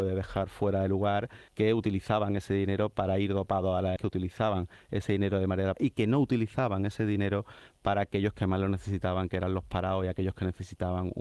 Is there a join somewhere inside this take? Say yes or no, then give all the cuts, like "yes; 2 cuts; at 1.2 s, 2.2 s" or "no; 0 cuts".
yes; 3 cuts; at 1.5 s, 4.0 s, 5.7 s